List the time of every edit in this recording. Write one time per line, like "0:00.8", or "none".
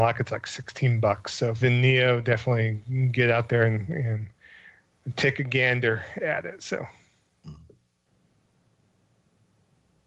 0:01.6